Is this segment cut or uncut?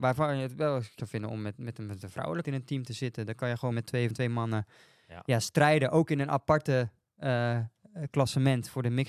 cut